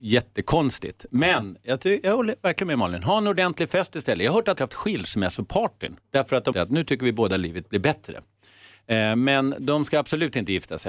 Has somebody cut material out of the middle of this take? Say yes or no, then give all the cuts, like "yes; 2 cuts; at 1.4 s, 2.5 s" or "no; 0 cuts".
yes; 3 cuts; at 4.6 s, 6.0 s, 6.5 s